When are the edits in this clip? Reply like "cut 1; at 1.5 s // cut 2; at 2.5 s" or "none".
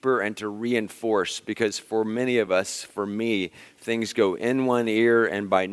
none